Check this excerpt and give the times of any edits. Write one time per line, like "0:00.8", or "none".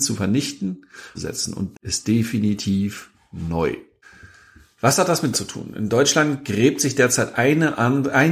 0:01.1
0:01.7
0:04.0
0:05.3